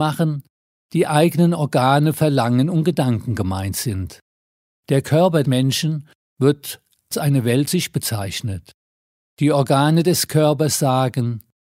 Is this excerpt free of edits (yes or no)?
no